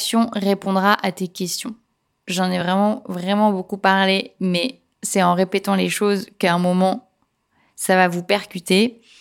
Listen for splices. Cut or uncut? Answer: uncut